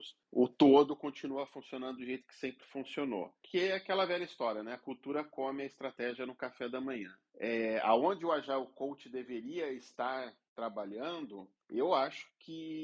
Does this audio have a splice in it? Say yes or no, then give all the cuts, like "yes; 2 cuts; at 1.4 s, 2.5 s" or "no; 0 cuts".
no; 0 cuts